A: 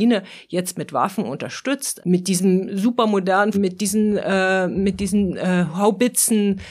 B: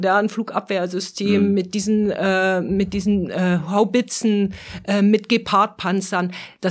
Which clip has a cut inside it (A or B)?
A